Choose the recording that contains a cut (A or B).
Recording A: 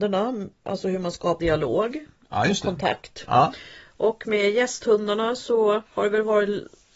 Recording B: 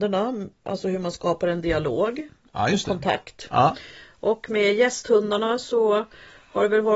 A